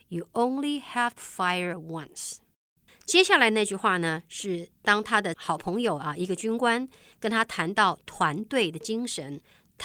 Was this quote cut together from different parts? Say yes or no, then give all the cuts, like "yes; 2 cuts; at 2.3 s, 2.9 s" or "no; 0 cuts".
yes; 1 cut; at 1.2 s